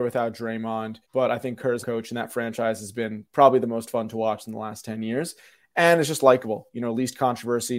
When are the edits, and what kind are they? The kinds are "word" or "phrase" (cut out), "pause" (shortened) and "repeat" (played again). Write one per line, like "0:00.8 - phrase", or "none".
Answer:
0:01.0 - pause
0:01.8 - phrase